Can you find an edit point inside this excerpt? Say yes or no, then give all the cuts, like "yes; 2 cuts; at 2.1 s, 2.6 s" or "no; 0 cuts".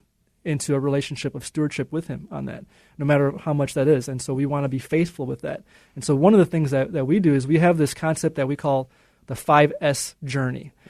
no; 0 cuts